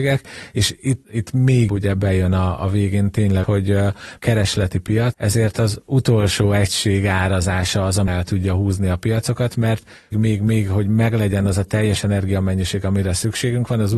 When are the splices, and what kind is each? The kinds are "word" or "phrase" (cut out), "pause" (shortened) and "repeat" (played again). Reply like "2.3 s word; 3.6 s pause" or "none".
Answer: 1.0 s word; 1.7 s word; 2.6 s word; 3.4 s word; 4.2 s word; 5.1 s word; 8.1 s word; 10.1 s word